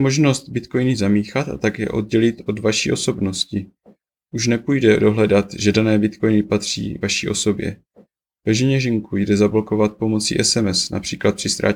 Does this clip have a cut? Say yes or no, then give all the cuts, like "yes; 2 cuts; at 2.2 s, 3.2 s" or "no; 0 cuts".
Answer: no; 0 cuts